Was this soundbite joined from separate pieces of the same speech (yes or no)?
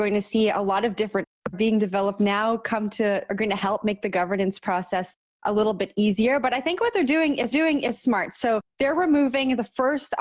yes